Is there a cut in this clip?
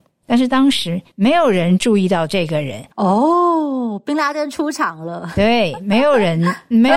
yes; 2 cuts; at 1.1 s, 2.9 s

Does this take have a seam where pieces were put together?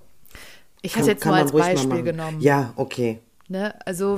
yes; 1 cut; at 1.0 s

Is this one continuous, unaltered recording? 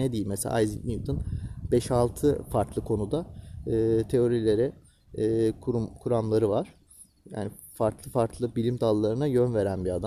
yes; 0 cuts

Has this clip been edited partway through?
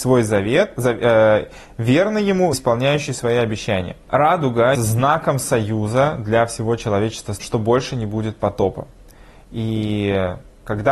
yes; 3 cuts; at 2.5 s, 4.7 s, 7.4 s

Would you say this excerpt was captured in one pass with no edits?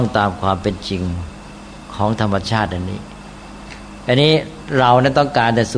yes; 0 cuts

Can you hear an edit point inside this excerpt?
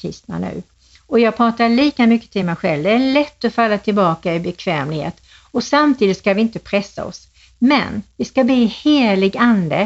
no; 0 cuts

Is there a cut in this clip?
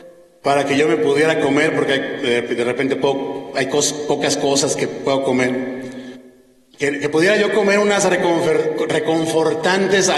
no; 0 cuts

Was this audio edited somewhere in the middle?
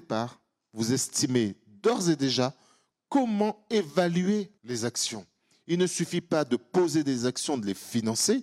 yes; 1 cut; at 4.6 s

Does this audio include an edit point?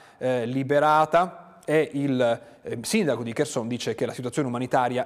no; 0 cuts

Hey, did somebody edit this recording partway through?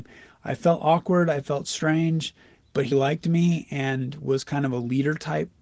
yes; 1 cut; at 2.9 s

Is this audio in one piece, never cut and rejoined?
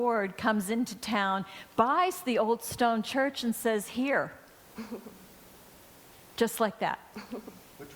yes; 0 cuts

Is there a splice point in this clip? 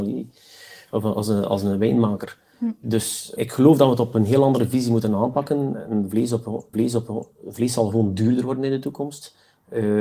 yes; 2 cuts; at 3.4 s, 6.7 s

